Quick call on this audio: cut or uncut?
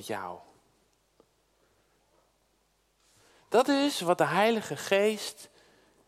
uncut